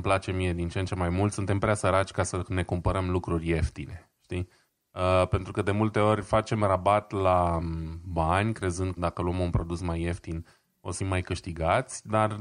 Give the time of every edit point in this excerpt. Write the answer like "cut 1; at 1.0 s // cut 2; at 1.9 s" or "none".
cut 1; at 9.0 s // cut 2; at 11.0 s